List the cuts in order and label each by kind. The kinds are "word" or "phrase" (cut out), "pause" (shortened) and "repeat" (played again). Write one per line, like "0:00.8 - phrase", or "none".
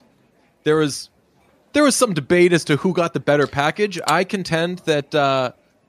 none